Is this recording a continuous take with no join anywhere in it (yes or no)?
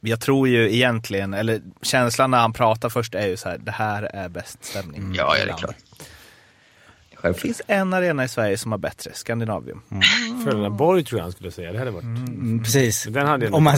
yes